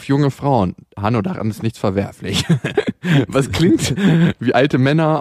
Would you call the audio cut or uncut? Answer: uncut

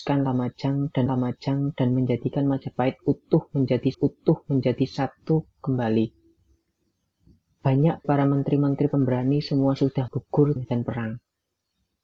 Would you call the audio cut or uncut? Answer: cut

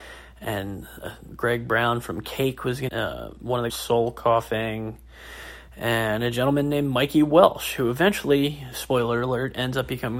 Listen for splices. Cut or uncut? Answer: cut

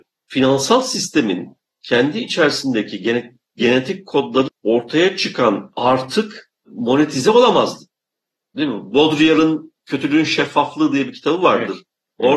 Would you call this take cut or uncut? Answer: cut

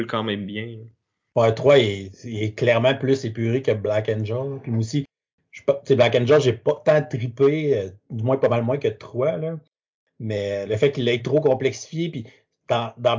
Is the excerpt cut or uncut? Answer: uncut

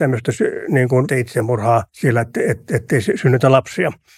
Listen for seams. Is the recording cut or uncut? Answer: cut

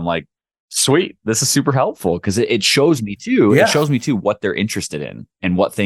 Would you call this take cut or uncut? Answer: uncut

